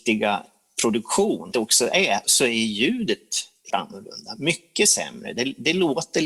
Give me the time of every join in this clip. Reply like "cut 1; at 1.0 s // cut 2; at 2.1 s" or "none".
cut 1; at 1.5 s // cut 2; at 2.2 s // cut 3; at 3.7 s